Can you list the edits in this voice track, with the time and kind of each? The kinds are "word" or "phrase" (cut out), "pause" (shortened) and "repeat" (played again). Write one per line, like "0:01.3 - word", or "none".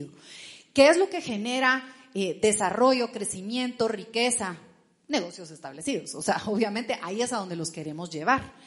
none